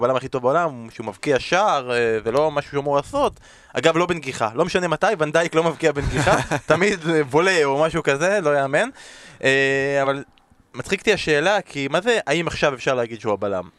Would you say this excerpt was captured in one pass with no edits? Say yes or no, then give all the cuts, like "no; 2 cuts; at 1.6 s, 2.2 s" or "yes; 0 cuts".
yes; 0 cuts